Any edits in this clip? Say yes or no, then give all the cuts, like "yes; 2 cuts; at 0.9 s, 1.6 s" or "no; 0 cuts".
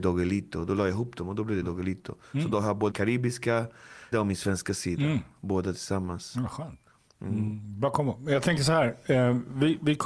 yes; 3 cuts; at 1.6 s, 2.9 s, 4.1 s